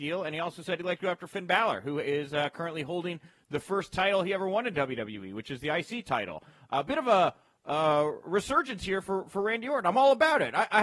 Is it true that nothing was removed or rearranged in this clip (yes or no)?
yes